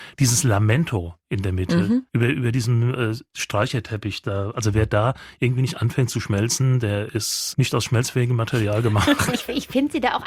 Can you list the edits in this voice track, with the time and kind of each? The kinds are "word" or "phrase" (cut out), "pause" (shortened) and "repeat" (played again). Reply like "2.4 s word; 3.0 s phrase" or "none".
2.1 s pause